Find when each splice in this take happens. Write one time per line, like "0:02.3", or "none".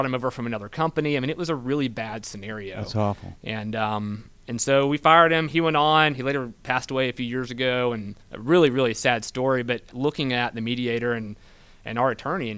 0:08.2
0:09.9